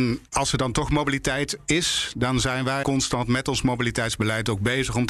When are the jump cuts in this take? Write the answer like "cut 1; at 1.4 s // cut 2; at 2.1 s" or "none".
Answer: cut 1; at 2.8 s

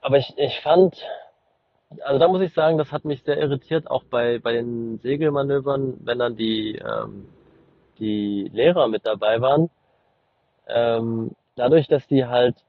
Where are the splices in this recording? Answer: none

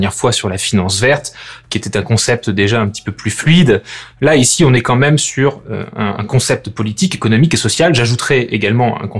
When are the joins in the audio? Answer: none

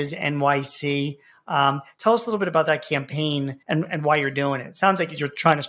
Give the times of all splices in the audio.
cut 1; at 3.6 s

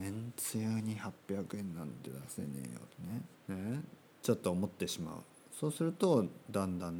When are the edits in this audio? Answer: cut 1; at 3.3 s

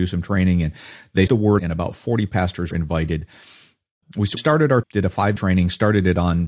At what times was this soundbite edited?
cut 1; at 1.3 s // cut 2; at 1.6 s // cut 3; at 2.7 s // cut 4; at 4.4 s // cut 5; at 4.8 s // cut 6; at 5.4 s

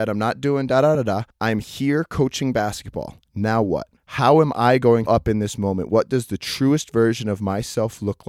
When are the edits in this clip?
cut 1; at 0.9 s // cut 2; at 1.3 s // cut 3; at 4.0 s // cut 4; at 5.1 s

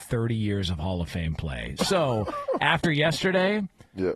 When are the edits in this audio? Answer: none

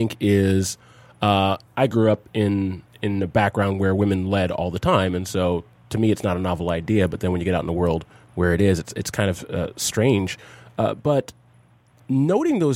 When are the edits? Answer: none

